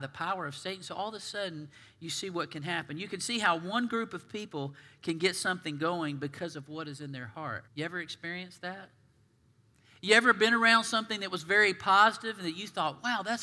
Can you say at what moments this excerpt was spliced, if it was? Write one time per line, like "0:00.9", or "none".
0:07.7